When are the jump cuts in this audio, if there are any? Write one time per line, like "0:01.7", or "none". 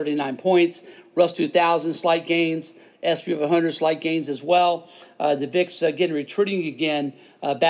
none